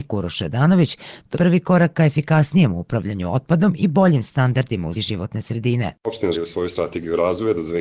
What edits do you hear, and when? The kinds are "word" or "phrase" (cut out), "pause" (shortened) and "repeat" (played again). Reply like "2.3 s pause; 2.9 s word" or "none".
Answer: 1.3 s word; 4.9 s word; 6.3 s word